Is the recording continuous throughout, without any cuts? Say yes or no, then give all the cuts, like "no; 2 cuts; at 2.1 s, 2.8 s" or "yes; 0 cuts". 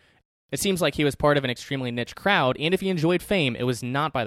yes; 0 cuts